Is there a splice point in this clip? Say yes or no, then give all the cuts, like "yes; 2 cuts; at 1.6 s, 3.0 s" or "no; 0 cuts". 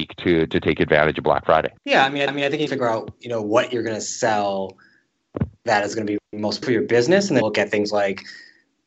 yes; 5 cuts; at 1.8 s, 2.3 s, 2.7 s, 6.6 s, 7.4 s